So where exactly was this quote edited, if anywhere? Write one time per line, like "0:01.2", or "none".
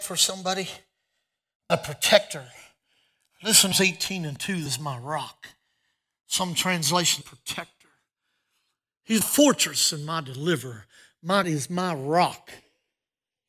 0:01.7
0:03.7
0:04.7
0:07.2
0:09.2
0:11.4

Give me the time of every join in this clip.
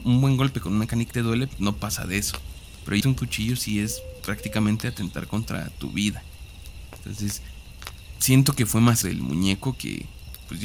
0:01.1
0:01.5
0:03.0
0:04.2
0:09.0

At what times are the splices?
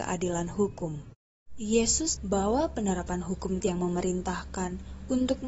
0:02.2
0:03.6

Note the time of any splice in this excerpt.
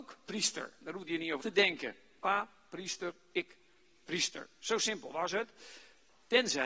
0:01.4

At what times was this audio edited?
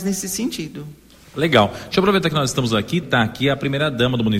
0:03.0

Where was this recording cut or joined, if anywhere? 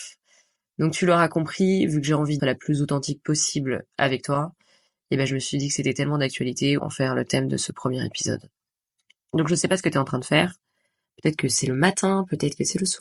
0:02.4
0:06.8

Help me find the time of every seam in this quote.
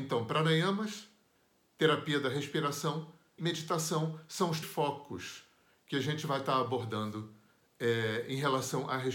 0:03.4
0:04.6

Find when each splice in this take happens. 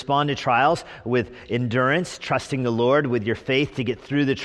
none

